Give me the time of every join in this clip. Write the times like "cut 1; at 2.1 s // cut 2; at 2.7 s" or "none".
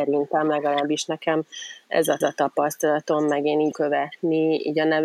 cut 1; at 2.2 s // cut 2; at 3.7 s